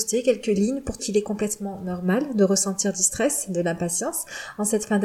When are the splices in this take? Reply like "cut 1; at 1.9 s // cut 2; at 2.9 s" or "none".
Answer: cut 1; at 1.0 s

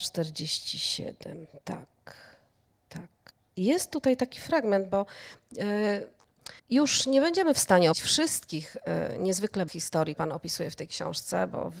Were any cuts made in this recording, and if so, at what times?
cut 1; at 3.3 s // cut 2; at 6.6 s // cut 3; at 7.9 s // cut 4; at 9.7 s // cut 5; at 10.1 s

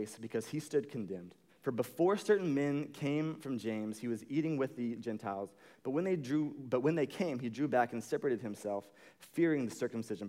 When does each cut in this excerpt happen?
cut 1; at 1.5 s

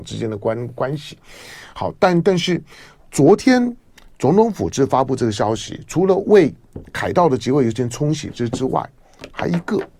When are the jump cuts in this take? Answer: none

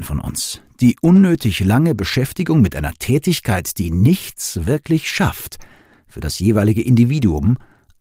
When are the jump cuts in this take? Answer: none

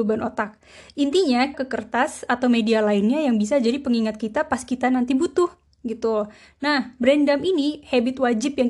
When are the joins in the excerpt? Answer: cut 1; at 1.5 s

